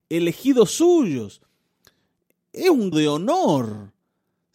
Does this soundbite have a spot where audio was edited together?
yes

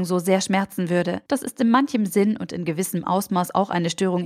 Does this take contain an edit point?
yes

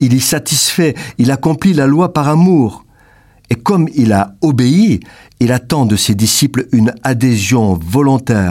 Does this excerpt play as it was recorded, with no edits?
yes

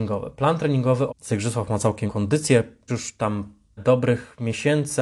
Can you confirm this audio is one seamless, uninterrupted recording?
no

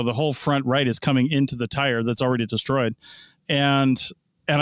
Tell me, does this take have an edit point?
no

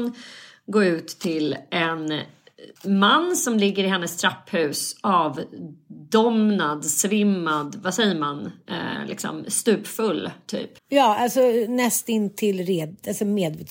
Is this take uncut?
no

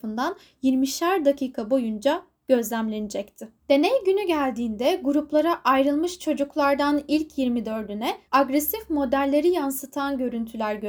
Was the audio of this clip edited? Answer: yes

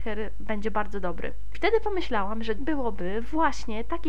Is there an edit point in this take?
yes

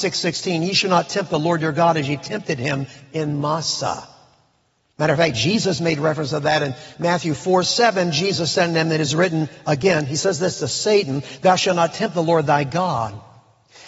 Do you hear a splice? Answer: no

